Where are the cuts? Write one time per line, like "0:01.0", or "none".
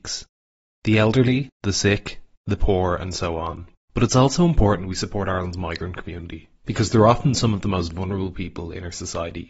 0:01.5
0:02.3